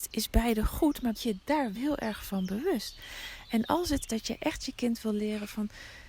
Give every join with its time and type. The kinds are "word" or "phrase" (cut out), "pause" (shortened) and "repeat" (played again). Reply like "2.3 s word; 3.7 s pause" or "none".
1.1 s word; 1.7 s word; 4.1 s word